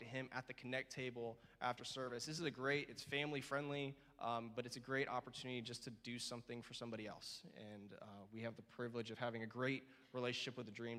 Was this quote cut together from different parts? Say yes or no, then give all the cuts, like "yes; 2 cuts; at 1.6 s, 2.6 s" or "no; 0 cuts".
no; 0 cuts